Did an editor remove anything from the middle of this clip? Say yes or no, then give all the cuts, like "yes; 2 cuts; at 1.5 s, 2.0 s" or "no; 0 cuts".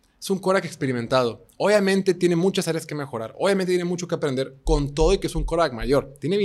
no; 0 cuts